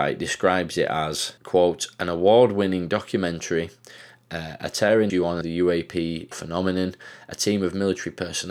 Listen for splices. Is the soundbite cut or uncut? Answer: cut